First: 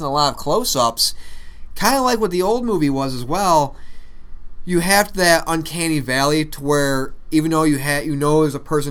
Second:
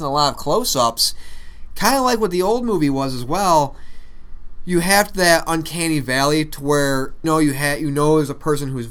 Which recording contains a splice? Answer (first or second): second